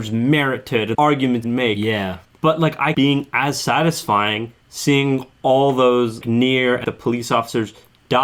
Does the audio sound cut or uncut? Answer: cut